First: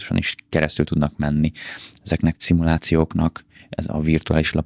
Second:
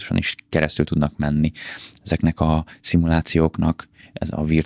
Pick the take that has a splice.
first; 1 cut; at 2.3 s

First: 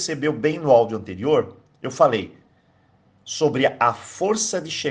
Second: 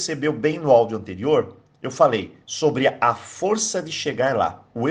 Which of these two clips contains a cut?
second; 1 cut; at 2.4 s

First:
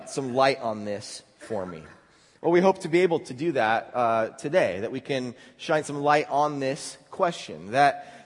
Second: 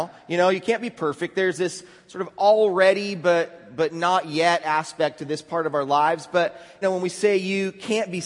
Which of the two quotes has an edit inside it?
second; 1 cut; at 6.8 s

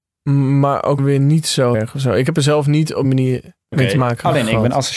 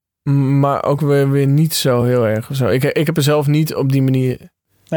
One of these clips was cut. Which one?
first; 5 cuts; at 1.0 s, 1.7 s, 2.3 s, 3.0 s, 3.7 s

